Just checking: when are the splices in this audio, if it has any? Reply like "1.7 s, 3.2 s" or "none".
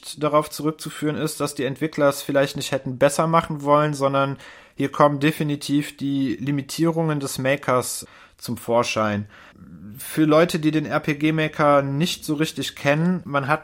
none